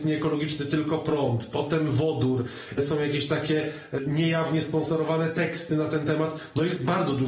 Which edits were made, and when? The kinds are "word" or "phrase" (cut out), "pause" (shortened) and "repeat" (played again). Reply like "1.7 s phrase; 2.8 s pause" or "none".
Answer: none